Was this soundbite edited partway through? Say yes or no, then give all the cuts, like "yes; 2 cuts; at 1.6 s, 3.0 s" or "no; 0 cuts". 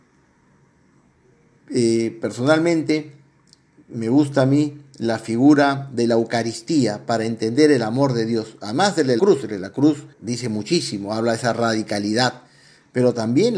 yes; 2 cuts; at 9.2 s, 10.1 s